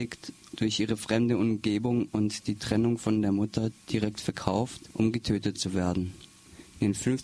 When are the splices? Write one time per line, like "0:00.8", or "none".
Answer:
none